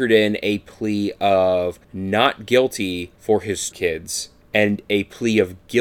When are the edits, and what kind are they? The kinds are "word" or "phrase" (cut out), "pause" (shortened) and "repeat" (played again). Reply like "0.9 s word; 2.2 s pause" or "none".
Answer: 1.8 s pause; 3.1 s pause; 3.7 s phrase